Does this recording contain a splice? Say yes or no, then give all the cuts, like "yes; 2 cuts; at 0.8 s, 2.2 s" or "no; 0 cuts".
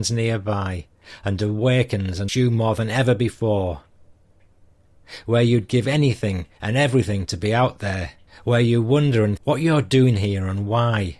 yes; 3 cuts; at 2.3 s, 8.3 s, 9.4 s